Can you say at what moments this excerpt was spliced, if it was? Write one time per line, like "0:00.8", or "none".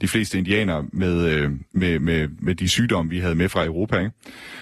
0:01.7